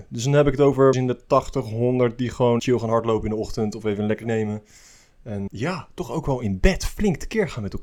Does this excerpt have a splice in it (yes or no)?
yes